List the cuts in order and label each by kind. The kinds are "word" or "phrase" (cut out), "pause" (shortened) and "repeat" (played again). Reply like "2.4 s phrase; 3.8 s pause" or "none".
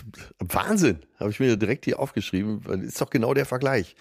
none